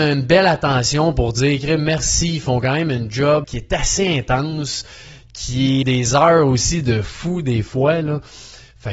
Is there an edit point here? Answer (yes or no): yes